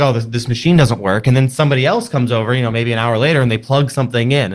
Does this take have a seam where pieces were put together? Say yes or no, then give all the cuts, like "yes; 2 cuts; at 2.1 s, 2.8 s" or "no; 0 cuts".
no; 0 cuts